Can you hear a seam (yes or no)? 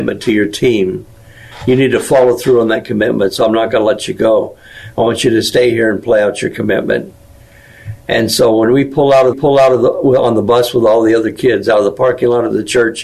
yes